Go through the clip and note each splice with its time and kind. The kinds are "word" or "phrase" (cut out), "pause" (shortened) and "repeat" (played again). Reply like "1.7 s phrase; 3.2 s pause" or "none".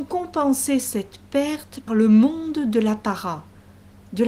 1.9 s word

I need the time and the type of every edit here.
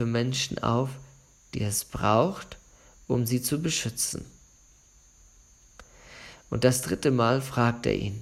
none

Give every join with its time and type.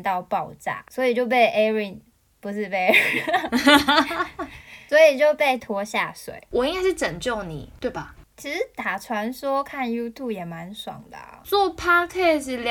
5.6 s word

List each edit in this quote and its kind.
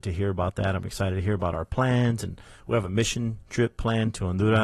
none

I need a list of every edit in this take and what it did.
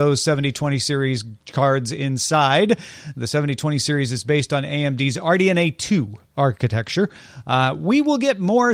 none

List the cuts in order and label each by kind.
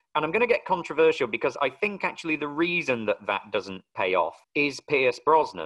4.4 s pause

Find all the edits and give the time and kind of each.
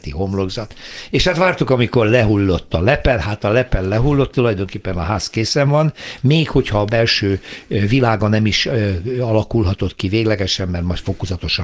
none

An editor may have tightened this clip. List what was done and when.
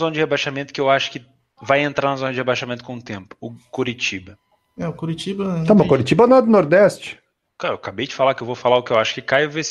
none

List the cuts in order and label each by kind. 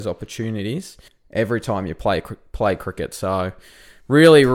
1.1 s pause

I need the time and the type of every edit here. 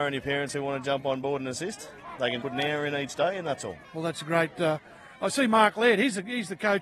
2.4 s word; 3.8 s pause

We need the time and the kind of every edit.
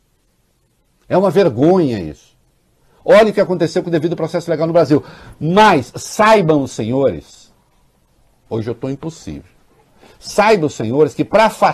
none

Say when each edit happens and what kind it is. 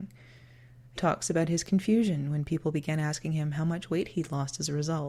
1.0 s word

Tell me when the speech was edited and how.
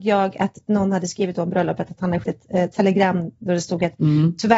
2.2 s word

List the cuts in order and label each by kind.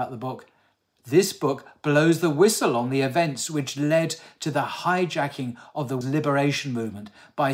6.0 s word

